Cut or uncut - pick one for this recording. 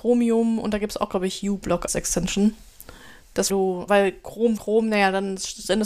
cut